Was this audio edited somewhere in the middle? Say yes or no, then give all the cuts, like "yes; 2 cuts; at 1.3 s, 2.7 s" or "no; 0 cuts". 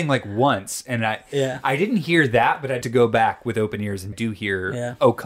yes; 2 cuts; at 2.8 s, 4.1 s